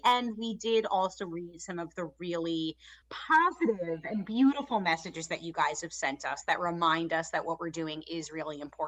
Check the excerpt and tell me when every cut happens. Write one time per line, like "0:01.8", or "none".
0:03.0